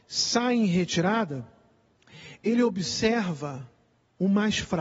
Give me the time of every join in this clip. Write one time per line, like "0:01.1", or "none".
none